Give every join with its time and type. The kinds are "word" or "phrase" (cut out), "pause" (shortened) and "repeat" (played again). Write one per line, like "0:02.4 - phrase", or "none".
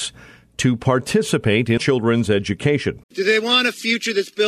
0:01.8 - word
0:03.0 - pause